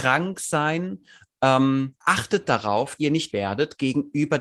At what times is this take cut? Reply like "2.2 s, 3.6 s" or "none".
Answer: 2.0 s, 3.0 s, 3.3 s